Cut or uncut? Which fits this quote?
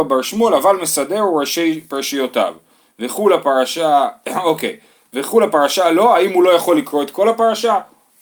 uncut